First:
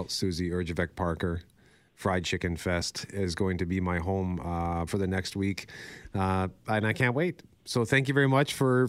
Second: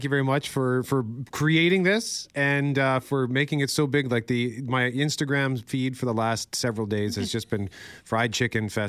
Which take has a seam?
first; 1 cut; at 4.9 s

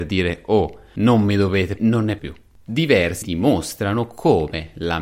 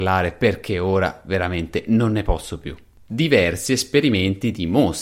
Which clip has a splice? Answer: first; 3 cuts; at 1.8 s, 2.2 s, 3.2 s

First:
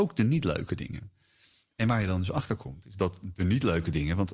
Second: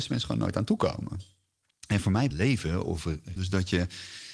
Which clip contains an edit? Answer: second; 2 cuts; at 2.3 s, 3.4 s

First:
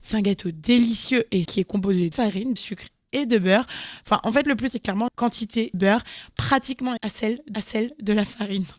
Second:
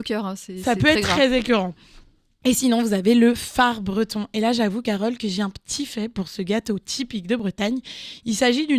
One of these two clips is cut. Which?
first; 8 cuts; at 1.5 s, 2.1 s, 2.6 s, 4.7 s, 5.1 s, 5.7 s, 7.0 s, 7.5 s

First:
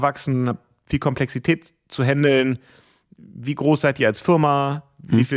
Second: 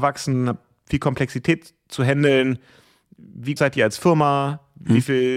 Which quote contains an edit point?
second; 1 cut; at 3.6 s

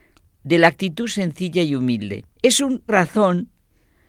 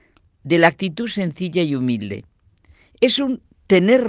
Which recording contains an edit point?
first; 2 cuts; at 2.4 s, 2.9 s

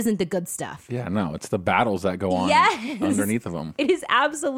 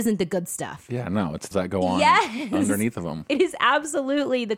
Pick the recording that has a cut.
second; 1 cut; at 1.5 s

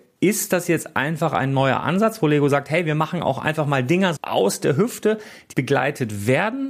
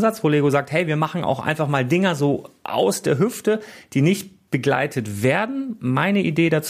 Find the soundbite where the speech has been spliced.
first; 2 cuts; at 4.2 s, 5.5 s

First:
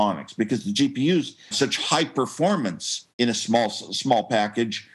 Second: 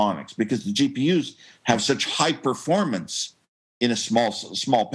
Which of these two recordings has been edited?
first; 2 cuts; at 1.5 s, 3.1 s

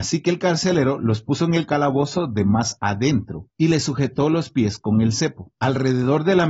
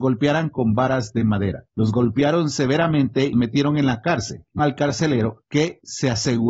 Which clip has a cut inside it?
second; 2 cuts; at 3.3 s, 4.6 s

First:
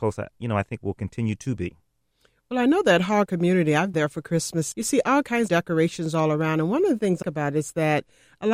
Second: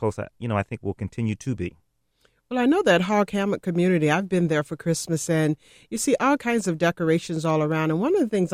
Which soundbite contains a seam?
first; 5 cuts; at 3.3 s, 3.9 s, 4.7 s, 5.5 s, 7.2 s

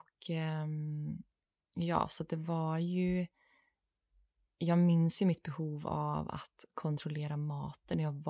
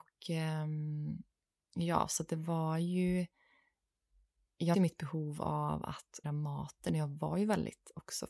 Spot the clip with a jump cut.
second; 2 cuts; at 4.7 s, 6.2 s

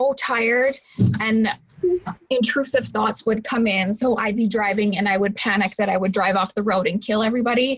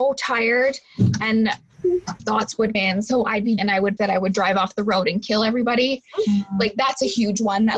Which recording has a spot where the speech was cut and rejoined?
second; 4 cuts; at 2.2 s, 2.7 s, 3.6 s, 4.0 s

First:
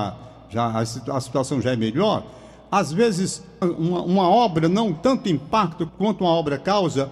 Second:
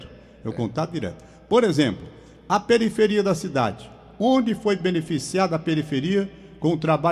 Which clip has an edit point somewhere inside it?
first; 3 cuts; at 3.6 s, 4.9 s, 5.9 s

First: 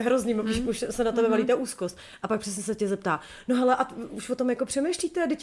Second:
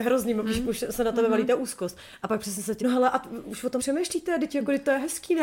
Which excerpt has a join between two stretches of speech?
second; 2 cuts; at 2.8 s, 3.8 s

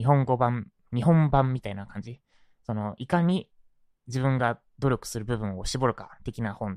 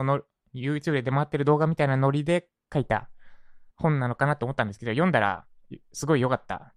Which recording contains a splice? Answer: second; 1 cut; at 3.7 s

